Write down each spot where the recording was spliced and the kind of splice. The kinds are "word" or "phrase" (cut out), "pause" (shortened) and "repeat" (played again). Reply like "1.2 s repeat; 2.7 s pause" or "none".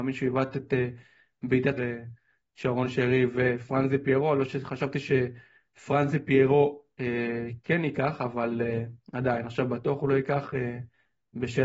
1.8 s phrase